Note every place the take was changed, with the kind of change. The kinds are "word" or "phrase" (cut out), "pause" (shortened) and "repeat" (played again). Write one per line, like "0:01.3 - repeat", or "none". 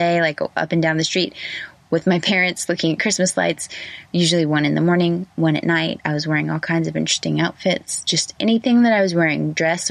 none